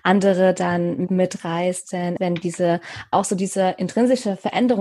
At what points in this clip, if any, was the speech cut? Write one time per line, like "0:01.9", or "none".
0:01.1
0:02.2
0:03.1